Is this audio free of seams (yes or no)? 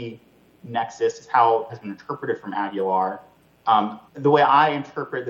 no